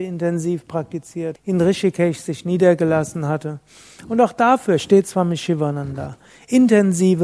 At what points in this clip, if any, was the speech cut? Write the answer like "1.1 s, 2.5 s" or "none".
1.4 s